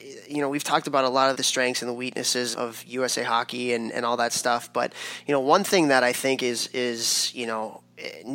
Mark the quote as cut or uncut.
cut